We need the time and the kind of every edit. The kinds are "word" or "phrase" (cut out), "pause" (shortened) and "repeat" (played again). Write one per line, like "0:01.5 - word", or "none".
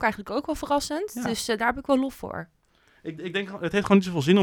none